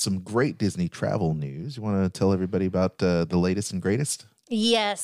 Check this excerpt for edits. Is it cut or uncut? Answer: uncut